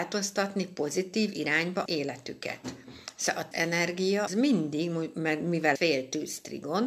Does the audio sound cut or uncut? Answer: cut